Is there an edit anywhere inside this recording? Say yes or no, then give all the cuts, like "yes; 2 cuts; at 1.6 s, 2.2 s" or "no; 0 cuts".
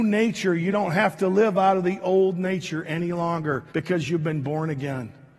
yes; 1 cut; at 3.7 s